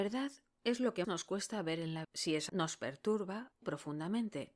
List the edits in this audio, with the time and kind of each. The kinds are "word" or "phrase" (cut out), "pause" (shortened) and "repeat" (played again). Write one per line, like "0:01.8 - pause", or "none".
0:01.0 - word
0:02.0 - word
0:02.5 - word
0:03.6 - word